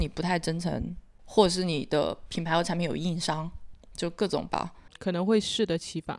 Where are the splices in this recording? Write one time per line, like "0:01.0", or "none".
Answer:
0:04.5